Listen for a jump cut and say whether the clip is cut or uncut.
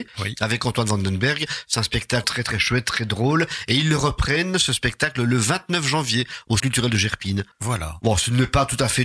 cut